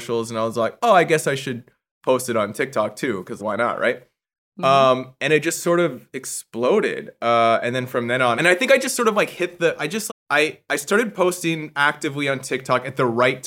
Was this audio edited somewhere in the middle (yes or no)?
yes